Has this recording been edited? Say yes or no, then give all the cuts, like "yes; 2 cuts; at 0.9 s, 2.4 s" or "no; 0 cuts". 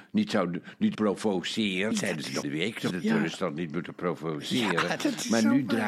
yes; 4 cuts; at 0.9 s, 1.9 s, 2.4 s, 2.9 s